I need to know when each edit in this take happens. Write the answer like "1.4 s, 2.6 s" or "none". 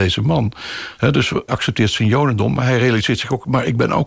1.5 s